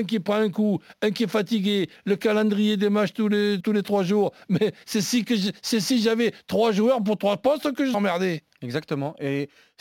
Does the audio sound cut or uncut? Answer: cut